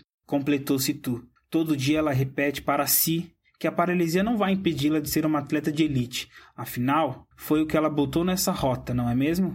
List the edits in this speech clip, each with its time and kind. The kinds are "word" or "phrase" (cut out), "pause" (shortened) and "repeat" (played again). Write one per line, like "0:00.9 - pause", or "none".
0:01.4 - pause
0:07.3 - pause